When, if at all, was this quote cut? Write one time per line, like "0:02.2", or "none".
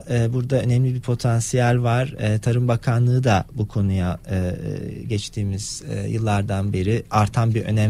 none

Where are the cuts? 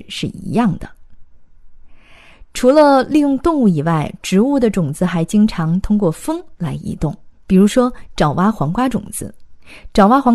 0:07.3

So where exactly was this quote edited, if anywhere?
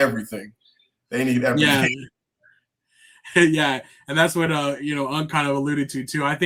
none

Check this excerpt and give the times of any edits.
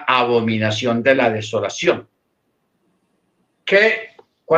none

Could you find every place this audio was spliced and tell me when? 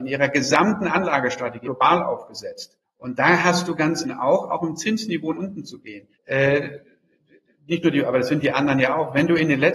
0:01.6
0:02.8
0:04.0
0:05.3
0:06.1

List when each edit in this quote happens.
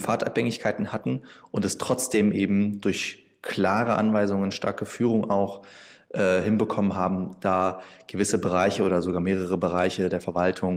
none

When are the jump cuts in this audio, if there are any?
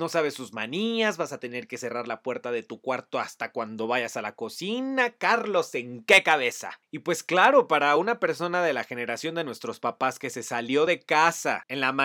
none

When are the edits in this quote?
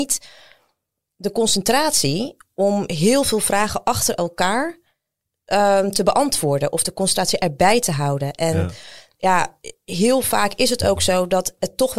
none

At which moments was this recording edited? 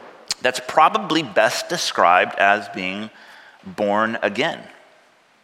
none

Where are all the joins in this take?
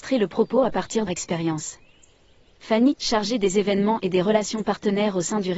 0:01.1
0:02.9

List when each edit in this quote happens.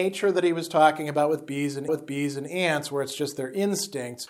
0:01.9

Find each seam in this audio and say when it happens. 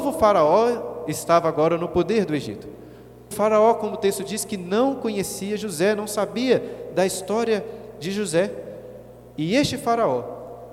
0:03.3

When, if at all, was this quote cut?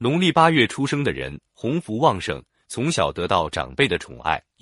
none

